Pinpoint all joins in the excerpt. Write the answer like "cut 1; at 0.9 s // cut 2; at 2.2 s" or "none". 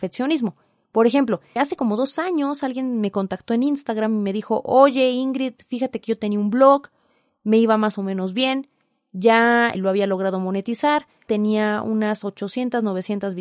cut 1; at 1.6 s // cut 2; at 9.7 s // cut 3; at 11.3 s